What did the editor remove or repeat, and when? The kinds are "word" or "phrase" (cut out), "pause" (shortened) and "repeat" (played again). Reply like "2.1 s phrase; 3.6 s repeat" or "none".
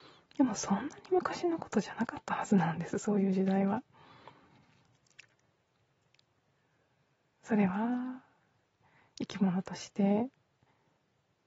none

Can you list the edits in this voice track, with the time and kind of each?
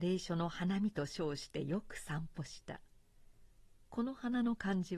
none

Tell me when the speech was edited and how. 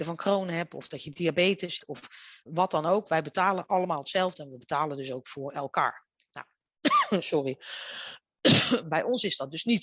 1.8 s word; 2.5 s word

